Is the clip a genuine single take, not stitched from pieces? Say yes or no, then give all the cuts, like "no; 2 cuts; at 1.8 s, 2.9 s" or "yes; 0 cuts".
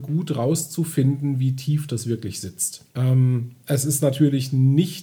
no; 1 cut; at 2.9 s